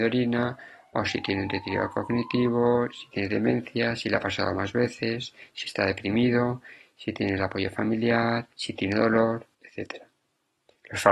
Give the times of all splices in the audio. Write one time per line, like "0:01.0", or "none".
0:08.5
0:09.5